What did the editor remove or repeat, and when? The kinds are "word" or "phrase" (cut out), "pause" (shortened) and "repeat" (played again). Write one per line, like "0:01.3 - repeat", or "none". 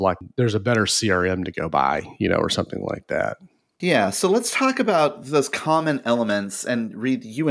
none